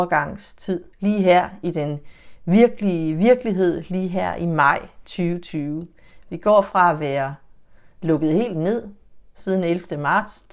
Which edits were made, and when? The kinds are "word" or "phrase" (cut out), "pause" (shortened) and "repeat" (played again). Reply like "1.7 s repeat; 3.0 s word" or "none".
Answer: 0.9 s pause